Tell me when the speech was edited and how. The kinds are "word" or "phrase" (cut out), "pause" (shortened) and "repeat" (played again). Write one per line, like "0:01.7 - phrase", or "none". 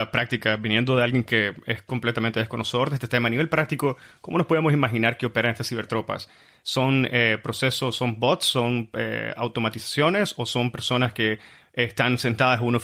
none